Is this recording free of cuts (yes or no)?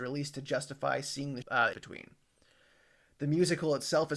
no